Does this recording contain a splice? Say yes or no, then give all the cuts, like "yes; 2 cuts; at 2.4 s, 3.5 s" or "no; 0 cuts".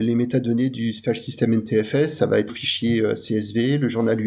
yes; 1 cut; at 2.5 s